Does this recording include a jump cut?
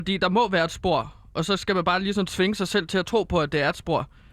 no; 0 cuts

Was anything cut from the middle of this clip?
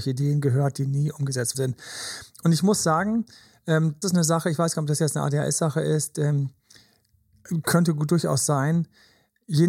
yes; 2 cuts; at 1.5 s, 4.0 s

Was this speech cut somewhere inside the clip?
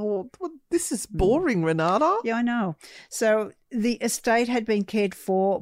no; 0 cuts

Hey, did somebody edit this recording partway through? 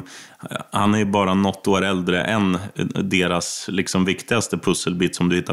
no; 0 cuts

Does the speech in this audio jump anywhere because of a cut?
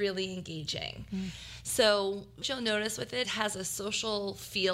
yes; 2 cuts; at 2.4 s, 3.2 s

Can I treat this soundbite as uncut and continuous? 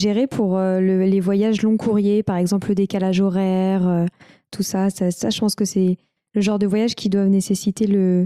yes; 0 cuts

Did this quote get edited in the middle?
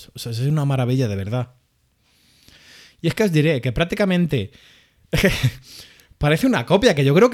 no; 0 cuts

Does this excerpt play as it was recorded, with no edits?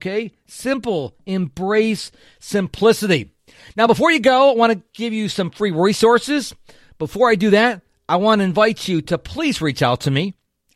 yes; 0 cuts

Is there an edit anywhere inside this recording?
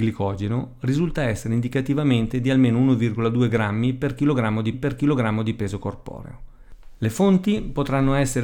yes; 1 cut; at 4.7 s

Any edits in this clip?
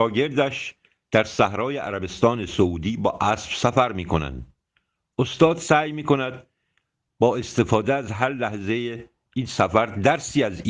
no; 0 cuts

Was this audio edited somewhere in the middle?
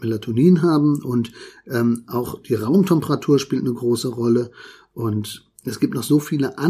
no; 0 cuts

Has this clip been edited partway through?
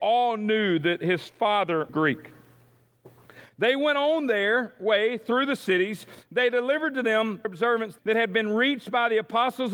yes; 3 cuts; at 1.9 s, 7.4 s, 8.0 s

